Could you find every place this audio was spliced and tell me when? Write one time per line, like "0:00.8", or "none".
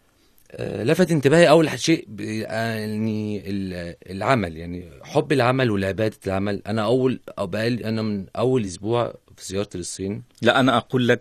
none